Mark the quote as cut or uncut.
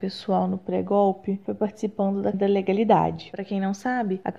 cut